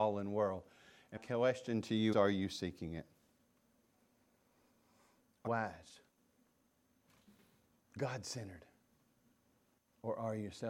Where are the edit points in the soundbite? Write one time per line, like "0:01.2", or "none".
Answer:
0:01.2
0:02.1
0:05.5
0:08.0